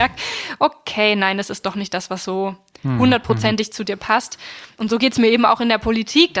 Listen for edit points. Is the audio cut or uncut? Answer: uncut